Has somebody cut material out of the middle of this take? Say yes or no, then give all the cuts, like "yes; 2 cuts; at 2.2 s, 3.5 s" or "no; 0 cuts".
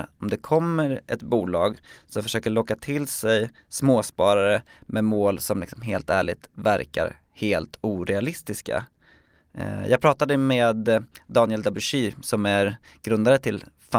no; 0 cuts